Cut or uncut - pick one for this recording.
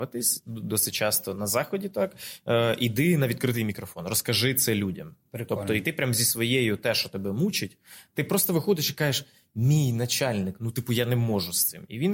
uncut